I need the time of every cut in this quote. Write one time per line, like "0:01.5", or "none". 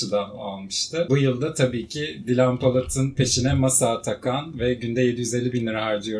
none